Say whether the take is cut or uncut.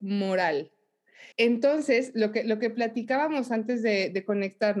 cut